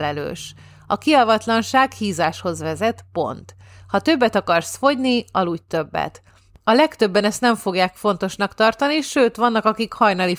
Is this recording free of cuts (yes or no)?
yes